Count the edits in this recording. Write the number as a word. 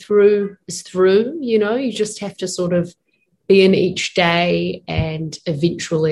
zero